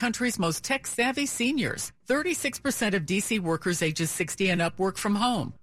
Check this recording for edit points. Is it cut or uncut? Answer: uncut